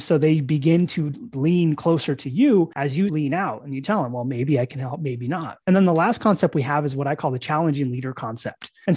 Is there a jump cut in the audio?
yes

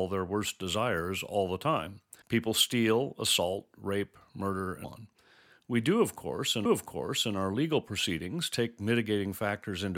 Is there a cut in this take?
yes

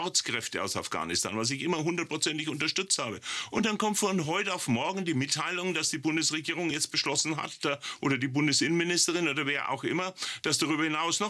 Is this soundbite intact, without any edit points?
yes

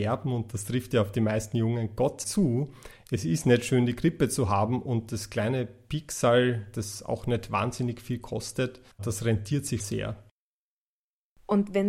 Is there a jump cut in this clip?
yes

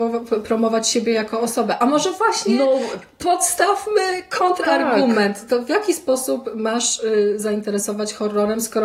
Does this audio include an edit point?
no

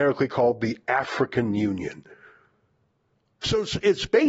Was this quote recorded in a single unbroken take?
yes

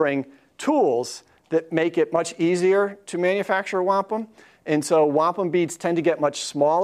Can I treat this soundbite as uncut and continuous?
yes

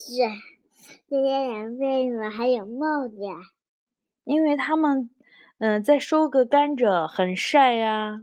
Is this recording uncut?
yes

